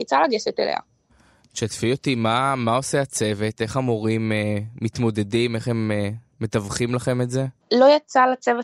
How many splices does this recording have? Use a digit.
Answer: 1